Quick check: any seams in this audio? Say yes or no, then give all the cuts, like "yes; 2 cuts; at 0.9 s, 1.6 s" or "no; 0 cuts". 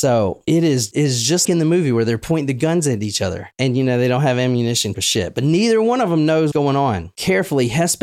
yes; 4 cuts; at 0.9 s, 1.4 s, 4.9 s, 6.5 s